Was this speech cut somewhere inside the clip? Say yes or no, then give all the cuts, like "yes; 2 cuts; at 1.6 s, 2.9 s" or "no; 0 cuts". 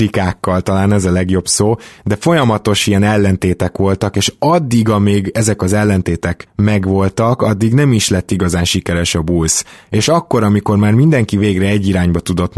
no; 0 cuts